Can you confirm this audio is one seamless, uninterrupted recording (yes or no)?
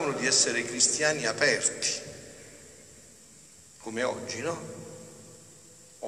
yes